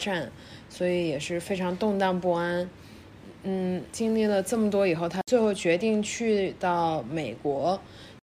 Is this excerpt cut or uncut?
cut